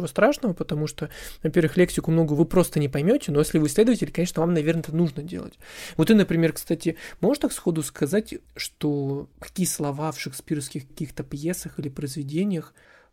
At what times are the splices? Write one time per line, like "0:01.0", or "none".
0:09.3